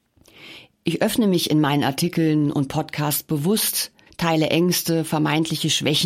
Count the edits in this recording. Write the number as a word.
one